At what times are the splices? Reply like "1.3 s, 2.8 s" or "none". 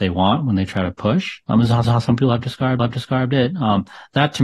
1.4 s, 1.8 s, 2.8 s